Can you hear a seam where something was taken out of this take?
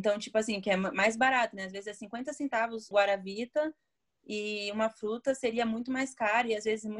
yes; 1 cut; at 2.9 s

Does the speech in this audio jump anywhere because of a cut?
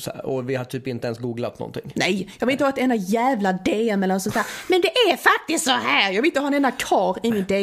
no; 0 cuts

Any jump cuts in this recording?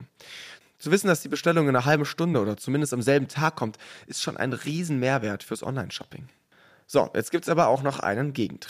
no; 0 cuts

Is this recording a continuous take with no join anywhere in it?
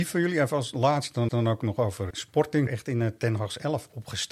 no; 3 cuts; at 1.3 s, 2.1 s, 2.7 s

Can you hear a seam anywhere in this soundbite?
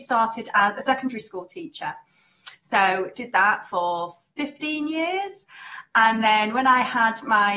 no; 0 cuts

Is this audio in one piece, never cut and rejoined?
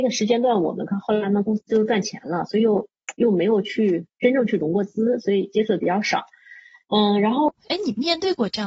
yes; 0 cuts

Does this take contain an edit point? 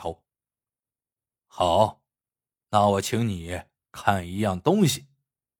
no; 0 cuts

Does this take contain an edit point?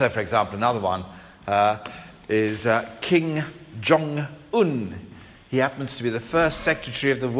no; 0 cuts

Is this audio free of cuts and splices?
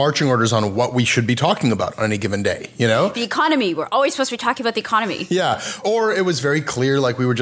yes; 0 cuts

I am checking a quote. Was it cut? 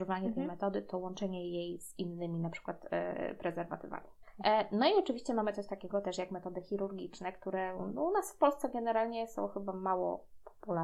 no; 0 cuts

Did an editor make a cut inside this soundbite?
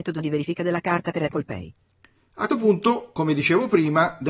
yes; 1 cut; at 2.5 s

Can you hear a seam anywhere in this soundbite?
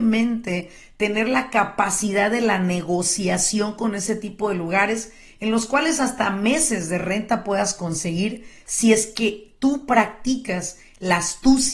no; 0 cuts

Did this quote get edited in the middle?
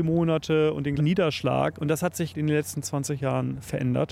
yes; 2 cuts; at 1.0 s, 2.3 s

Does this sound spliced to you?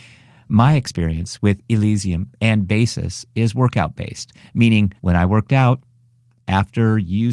yes; 1 cut; at 5.0 s

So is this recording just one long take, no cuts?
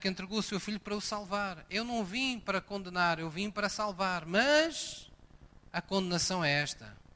yes; 0 cuts

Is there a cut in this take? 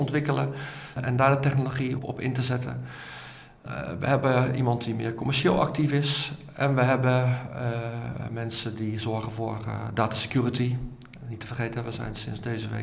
yes; 1 cut; at 2.0 s

